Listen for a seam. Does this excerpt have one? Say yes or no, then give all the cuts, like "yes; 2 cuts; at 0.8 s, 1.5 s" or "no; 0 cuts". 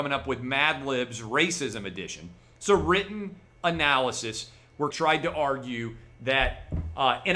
yes; 1 cut; at 4.9 s